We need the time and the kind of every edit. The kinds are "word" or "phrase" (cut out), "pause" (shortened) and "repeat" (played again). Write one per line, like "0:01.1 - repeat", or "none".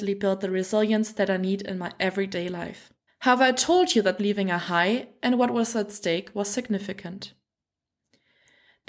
0:03.1 - pause
0:04.2 - phrase